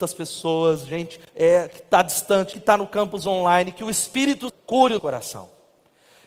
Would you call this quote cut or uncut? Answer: cut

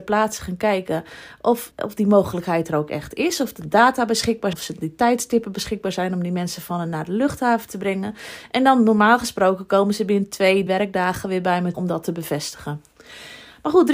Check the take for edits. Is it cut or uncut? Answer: cut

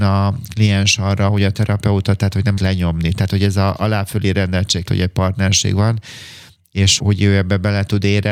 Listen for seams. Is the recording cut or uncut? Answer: cut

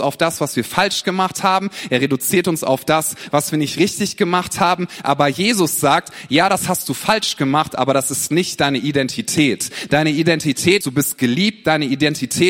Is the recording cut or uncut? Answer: cut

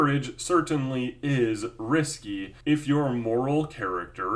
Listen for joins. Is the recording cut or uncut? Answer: cut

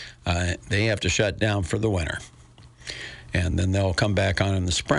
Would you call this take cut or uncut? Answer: uncut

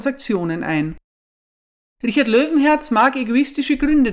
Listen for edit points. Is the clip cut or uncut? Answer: uncut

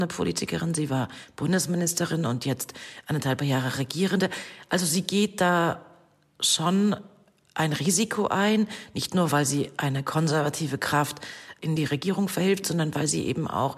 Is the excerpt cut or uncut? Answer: uncut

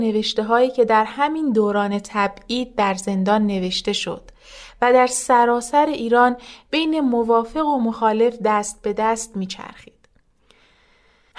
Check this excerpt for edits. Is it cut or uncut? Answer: uncut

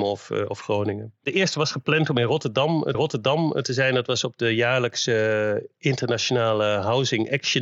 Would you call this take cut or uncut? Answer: cut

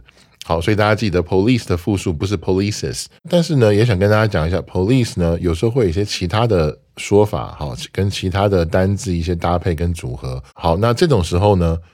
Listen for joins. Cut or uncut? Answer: cut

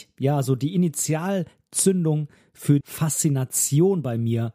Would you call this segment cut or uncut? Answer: cut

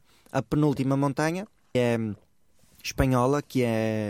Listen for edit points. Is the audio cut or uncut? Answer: cut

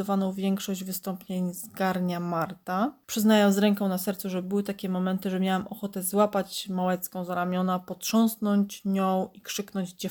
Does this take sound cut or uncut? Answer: uncut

